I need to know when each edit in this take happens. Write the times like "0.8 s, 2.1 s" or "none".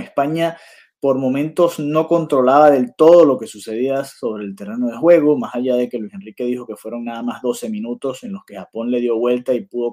none